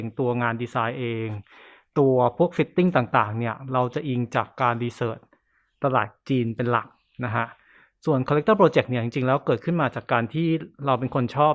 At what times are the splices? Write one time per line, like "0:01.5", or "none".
none